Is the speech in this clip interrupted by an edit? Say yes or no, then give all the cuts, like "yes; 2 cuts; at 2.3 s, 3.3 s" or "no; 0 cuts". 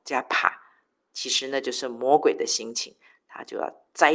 no; 0 cuts